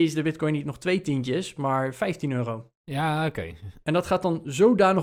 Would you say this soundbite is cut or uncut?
uncut